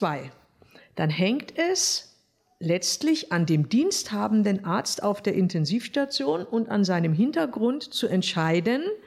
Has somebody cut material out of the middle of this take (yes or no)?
no